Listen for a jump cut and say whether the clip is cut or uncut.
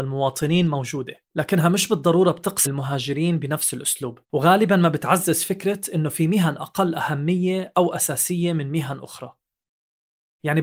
cut